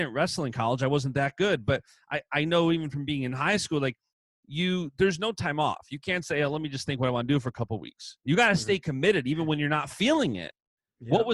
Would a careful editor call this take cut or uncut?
uncut